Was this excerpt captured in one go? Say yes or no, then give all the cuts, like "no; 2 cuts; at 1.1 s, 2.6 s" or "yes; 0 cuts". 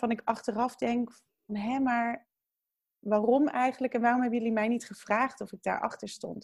no; 1 cut; at 1.5 s